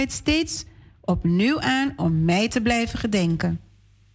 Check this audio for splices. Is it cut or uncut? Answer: uncut